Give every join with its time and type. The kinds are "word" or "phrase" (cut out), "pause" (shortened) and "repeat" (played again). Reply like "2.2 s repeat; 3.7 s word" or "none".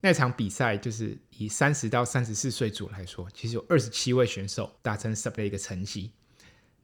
4.8 s pause; 5.4 s word